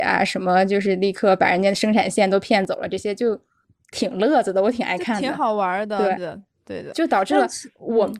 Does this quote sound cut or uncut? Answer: cut